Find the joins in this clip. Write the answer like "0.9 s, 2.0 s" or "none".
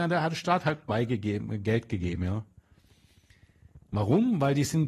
3.8 s